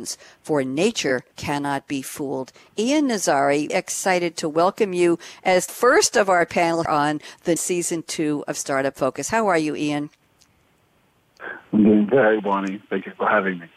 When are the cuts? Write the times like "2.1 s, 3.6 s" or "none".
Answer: 1.3 s, 3.7 s, 5.7 s, 6.8 s, 7.6 s, 12.4 s